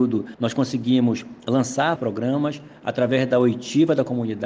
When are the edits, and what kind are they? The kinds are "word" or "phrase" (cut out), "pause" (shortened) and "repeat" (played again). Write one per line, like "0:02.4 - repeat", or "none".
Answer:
0:02.0 - word